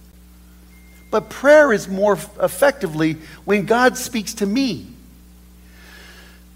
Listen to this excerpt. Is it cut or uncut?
uncut